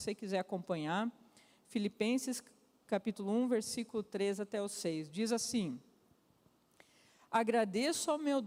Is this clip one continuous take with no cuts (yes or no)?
yes